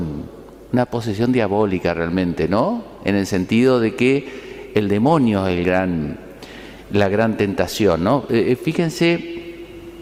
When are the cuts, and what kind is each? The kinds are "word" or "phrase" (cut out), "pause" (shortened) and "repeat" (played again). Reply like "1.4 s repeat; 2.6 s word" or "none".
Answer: none